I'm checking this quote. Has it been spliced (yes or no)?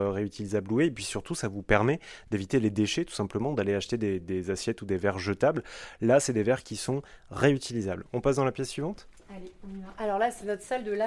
no